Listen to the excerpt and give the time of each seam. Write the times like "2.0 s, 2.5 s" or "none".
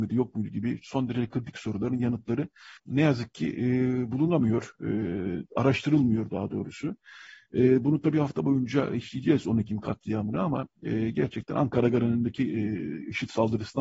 2.8 s